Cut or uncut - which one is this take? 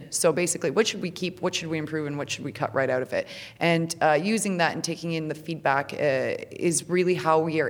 uncut